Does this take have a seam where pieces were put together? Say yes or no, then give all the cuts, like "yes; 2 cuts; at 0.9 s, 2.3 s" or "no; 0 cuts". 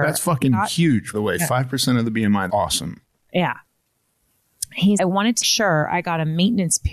yes; 4 cuts; at 1.1 s, 2.5 s, 5.0 s, 5.4 s